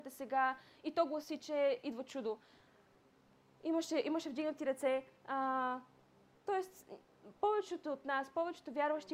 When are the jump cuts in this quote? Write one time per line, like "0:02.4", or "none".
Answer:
none